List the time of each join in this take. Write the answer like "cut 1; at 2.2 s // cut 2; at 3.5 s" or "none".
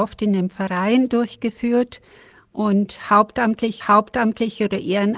cut 1; at 3.8 s